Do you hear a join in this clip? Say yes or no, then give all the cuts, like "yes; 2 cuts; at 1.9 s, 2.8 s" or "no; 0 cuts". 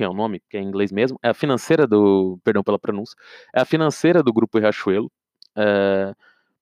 no; 0 cuts